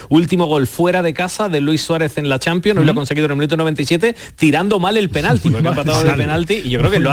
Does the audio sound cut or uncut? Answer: uncut